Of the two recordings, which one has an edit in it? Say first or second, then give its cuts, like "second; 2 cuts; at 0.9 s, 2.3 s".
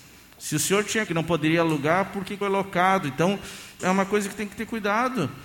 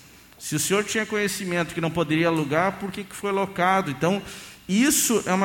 first; 3 cuts; at 1.1 s, 2.4 s, 3.8 s